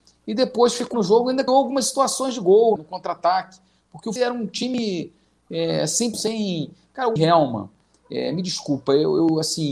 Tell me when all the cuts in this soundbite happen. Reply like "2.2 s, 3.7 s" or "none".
0.9 s, 1.5 s, 2.8 s, 4.2 s, 6.1 s, 7.2 s